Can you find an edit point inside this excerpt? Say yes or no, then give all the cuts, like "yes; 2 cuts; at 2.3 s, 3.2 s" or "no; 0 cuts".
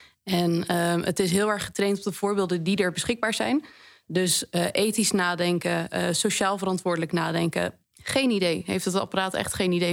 no; 0 cuts